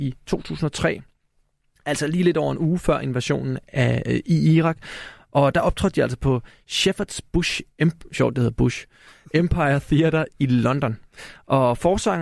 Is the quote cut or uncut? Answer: uncut